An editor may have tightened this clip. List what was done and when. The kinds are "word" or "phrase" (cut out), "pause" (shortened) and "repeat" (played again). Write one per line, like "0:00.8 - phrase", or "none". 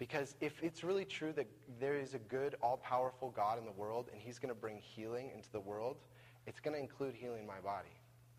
none

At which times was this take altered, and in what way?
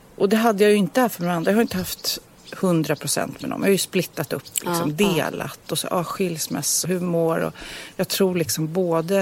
0:05.8 - phrase
0:06.8 - word

